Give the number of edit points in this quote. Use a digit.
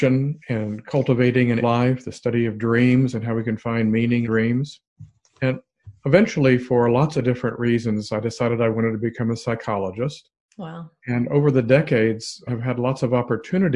3